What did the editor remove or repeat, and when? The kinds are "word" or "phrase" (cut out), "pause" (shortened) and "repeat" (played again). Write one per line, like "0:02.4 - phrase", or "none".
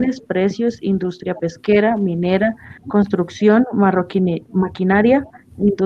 0:02.8 - pause

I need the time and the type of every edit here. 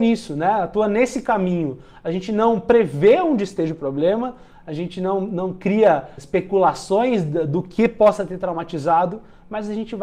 0:06.2 - word

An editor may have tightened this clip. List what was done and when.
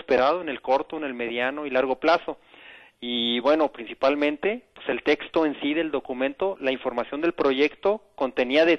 none

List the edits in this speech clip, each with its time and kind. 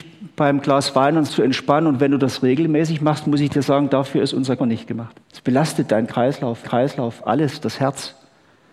0:01.3 - word
0:04.6 - word
0:05.2 - pause
0:06.6 - repeat

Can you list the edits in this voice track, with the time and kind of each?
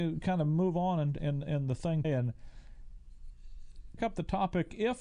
0:01.2 - word
0:02.0 - word
0:04.0 - word

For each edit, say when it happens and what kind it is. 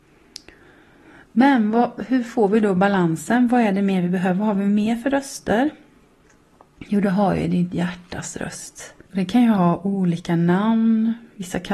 0:09.0 - pause

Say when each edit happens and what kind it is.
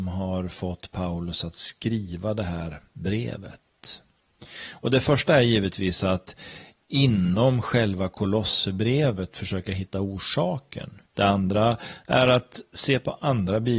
0:11.1 - pause

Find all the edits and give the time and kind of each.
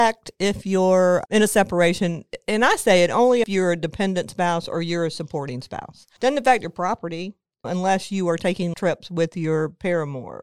0:03.4 - phrase
0:08.7 - word

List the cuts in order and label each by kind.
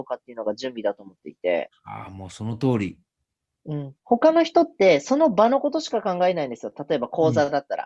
none

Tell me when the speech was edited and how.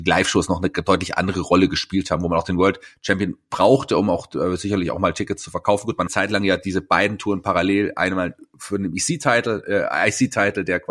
0:06.1 - phrase

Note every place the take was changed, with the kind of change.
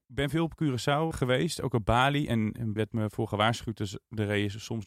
0:01.1 - word
0:02.8 - word

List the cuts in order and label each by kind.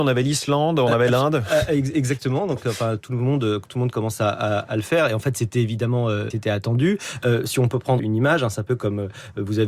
0:06.3 - word
0:08.0 - word

